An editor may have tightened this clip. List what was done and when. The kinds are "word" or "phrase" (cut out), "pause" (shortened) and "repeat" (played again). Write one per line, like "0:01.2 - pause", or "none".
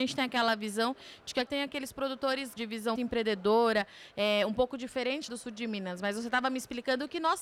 0:01.5 - word
0:02.6 - word
0:03.0 - word
0:05.3 - word